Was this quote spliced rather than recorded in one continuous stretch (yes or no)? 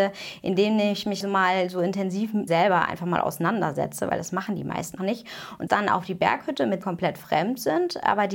yes